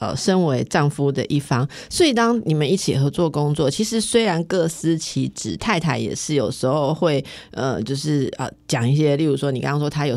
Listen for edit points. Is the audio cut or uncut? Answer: uncut